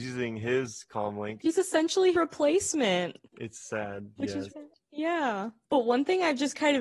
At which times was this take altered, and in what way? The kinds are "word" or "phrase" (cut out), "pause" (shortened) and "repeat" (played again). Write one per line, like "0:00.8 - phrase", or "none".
0:02.1 - word
0:03.3 - pause
0:04.2 - word
0:04.5 - word